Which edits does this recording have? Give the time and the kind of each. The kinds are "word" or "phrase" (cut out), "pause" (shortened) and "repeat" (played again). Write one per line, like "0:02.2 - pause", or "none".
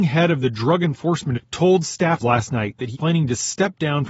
0:01.3 - word
0:02.2 - word
0:02.9 - word

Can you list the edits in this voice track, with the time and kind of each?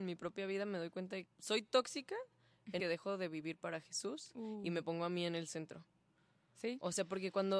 0:01.3 - word
0:02.8 - phrase

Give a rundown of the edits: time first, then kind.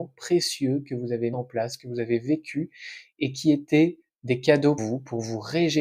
0:01.3 - word
0:04.8 - word

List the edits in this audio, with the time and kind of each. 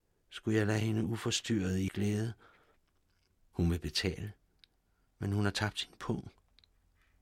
0:01.9 - word

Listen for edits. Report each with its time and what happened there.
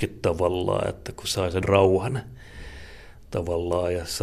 0:01.6 - word

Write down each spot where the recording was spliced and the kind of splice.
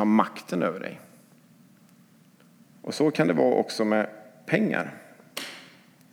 none

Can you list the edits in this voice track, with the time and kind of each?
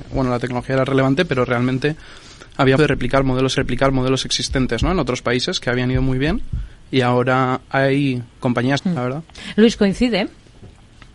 0:02.8 - word
0:03.6 - repeat
0:08.8 - phrase

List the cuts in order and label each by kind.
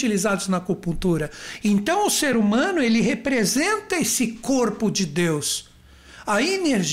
none

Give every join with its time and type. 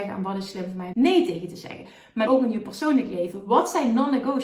0:00.9 - word
0:02.3 - word

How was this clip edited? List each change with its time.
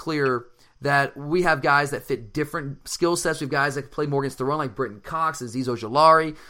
none

